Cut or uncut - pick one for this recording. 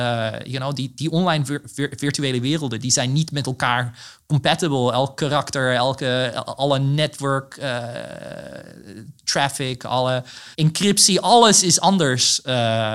cut